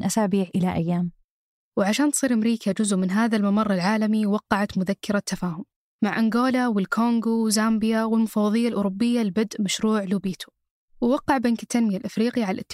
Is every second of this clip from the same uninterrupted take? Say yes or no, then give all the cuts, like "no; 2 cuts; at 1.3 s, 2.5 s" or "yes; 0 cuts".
yes; 0 cuts